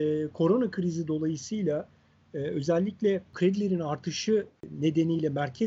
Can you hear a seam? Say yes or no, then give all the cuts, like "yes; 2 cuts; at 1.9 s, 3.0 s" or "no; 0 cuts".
no; 0 cuts